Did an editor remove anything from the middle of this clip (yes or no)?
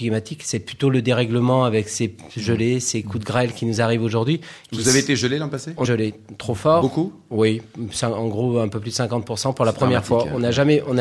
yes